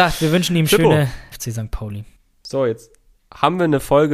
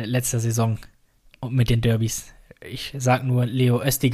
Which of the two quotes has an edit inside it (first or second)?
first